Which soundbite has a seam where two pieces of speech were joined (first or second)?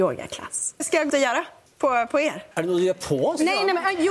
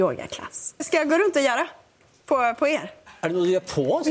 first